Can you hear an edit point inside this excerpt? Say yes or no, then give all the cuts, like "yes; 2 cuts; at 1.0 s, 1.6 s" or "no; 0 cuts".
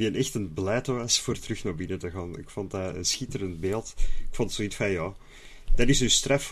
no; 0 cuts